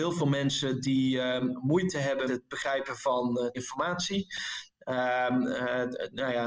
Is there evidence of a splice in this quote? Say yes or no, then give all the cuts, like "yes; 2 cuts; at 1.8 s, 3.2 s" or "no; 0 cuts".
yes; 2 cuts; at 2.3 s, 3.5 s